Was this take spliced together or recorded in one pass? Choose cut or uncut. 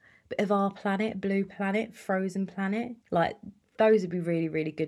cut